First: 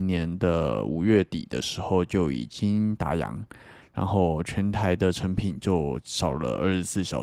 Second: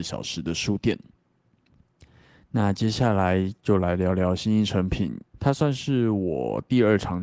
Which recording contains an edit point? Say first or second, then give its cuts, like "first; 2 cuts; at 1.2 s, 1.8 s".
second; 1 cut; at 5.3 s